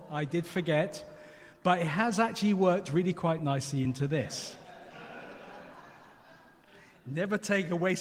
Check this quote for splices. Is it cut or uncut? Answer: uncut